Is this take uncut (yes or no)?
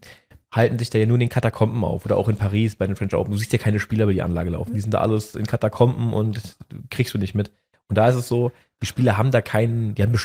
yes